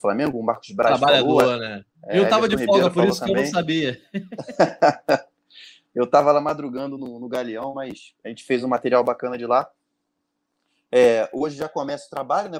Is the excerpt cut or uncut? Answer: uncut